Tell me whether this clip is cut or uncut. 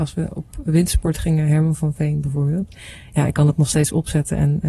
uncut